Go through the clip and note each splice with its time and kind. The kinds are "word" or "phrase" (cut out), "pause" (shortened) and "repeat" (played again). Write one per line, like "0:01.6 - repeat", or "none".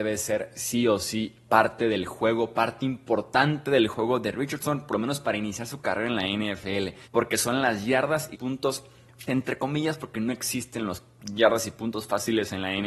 0:07.0 - pause
0:08.3 - word
0:09.3 - word